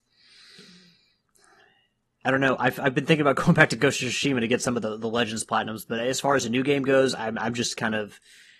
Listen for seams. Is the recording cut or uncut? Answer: uncut